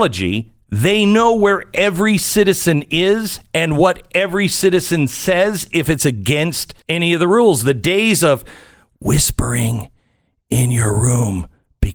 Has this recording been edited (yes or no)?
yes